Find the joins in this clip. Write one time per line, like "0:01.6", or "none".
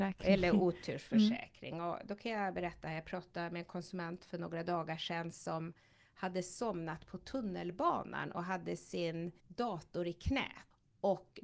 0:09.4

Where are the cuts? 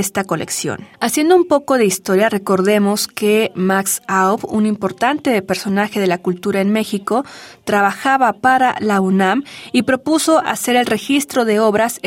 0:00.9

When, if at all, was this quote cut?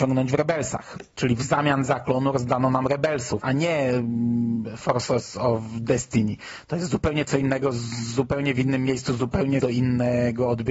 0:03.4
0:09.6

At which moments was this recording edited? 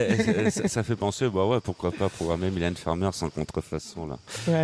none

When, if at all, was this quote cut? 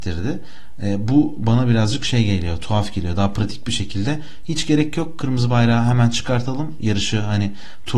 none

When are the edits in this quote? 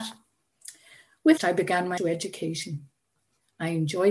0:01.4
0:02.0

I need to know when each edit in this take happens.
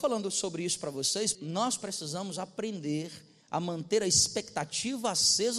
0:01.3
0:03.4

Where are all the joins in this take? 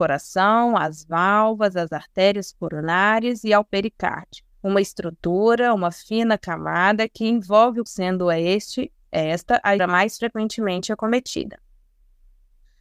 0:04.5
0:07.9
0:09.8

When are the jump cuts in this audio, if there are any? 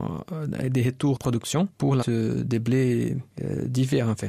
0:01.2
0:02.0

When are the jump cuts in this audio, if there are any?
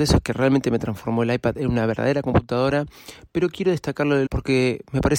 0:04.3

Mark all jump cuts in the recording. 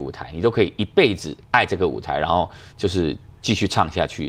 0:01.4

